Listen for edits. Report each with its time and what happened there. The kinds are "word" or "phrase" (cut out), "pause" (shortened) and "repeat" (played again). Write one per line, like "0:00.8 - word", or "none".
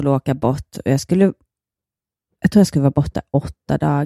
none